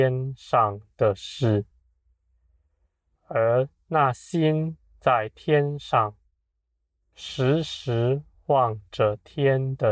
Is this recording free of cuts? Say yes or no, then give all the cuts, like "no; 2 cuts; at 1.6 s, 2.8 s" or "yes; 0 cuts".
yes; 0 cuts